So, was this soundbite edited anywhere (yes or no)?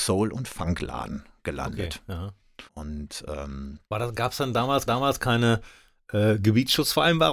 yes